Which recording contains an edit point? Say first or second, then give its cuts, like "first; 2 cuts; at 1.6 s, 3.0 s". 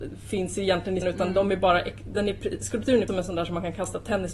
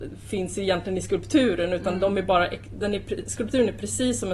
first; 2 cuts; at 1.0 s, 3.1 s